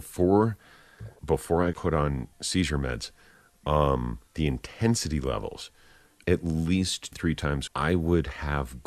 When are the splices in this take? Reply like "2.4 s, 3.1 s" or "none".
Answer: 1.2 s, 1.7 s, 2.3 s, 4.3 s, 6.2 s, 7.1 s, 7.7 s